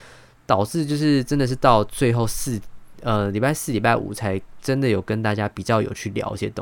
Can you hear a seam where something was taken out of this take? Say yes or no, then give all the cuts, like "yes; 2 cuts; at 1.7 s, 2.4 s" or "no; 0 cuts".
no; 0 cuts